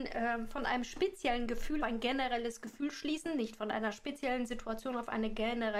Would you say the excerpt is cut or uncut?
cut